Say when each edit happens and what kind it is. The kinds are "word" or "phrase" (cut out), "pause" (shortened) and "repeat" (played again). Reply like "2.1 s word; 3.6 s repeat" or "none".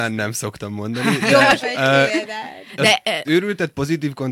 1.6 s word; 3.2 s word